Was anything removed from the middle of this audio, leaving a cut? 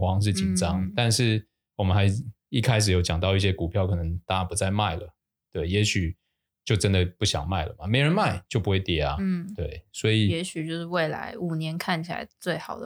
no; 0 cuts

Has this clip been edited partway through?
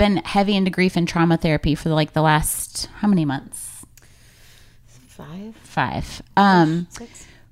no; 0 cuts

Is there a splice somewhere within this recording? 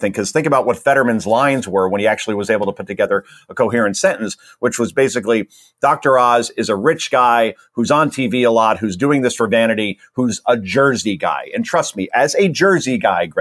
no; 0 cuts

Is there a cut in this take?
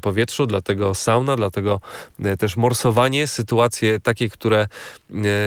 no; 0 cuts

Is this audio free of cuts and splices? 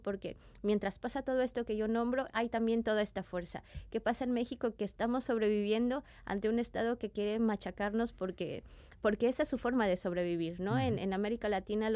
yes; 0 cuts

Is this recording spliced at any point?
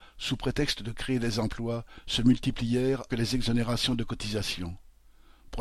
yes; 1 cut; at 3.1 s

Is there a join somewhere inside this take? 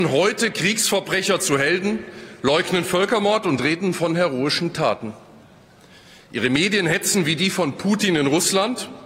no; 0 cuts

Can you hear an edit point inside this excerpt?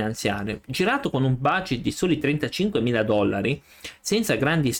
no; 0 cuts

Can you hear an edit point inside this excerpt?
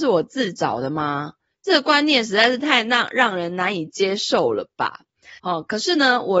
yes; 1 cut; at 5.4 s

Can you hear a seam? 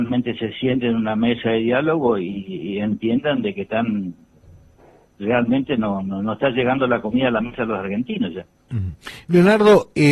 no; 0 cuts

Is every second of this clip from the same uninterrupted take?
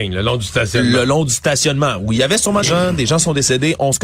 no; 1 cut; at 2.6 s

